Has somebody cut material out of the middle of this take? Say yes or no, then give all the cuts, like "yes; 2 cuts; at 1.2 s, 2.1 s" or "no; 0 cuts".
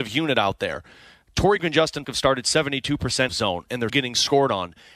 yes; 4 cuts; at 1.6 s, 2.0 s, 3.3 s, 3.9 s